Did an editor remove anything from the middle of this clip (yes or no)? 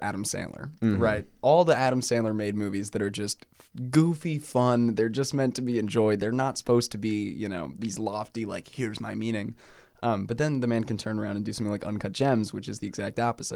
no